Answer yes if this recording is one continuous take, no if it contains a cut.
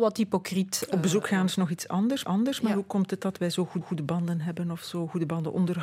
no